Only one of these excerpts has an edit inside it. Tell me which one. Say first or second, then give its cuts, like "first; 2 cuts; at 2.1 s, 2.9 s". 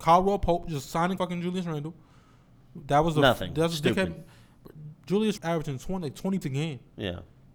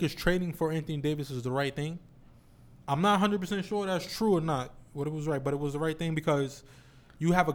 first; 3 cuts; at 1.2 s, 5.4 s, 6.4 s